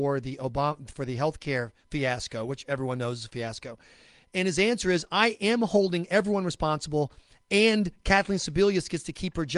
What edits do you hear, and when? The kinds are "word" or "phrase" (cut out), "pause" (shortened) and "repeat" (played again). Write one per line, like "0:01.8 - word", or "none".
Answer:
none